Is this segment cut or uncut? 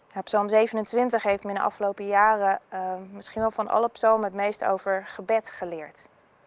uncut